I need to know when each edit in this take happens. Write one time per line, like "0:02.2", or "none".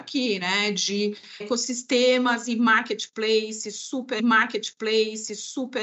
0:01.4
0:04.2